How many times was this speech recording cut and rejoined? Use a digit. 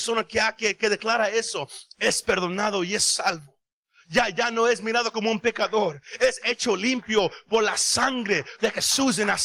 0